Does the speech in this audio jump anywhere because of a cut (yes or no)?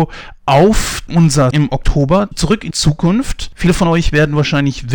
yes